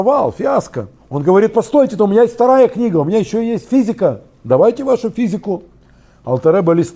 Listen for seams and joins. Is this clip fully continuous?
yes; 0 cuts

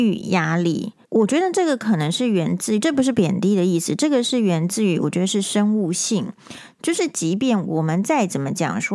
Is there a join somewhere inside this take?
yes; 1 cut; at 1.0 s

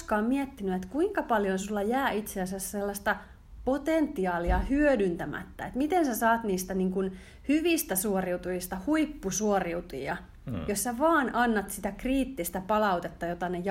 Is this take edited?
no; 0 cuts

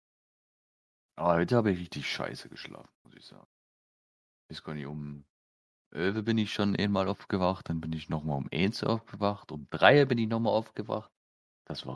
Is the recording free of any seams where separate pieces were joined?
yes; 0 cuts

